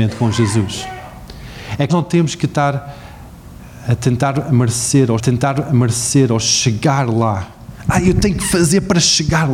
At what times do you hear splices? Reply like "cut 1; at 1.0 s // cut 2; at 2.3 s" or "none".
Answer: cut 1; at 1.9 s // cut 2; at 5.2 s